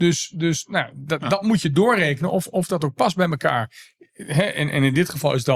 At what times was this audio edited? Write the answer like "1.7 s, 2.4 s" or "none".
none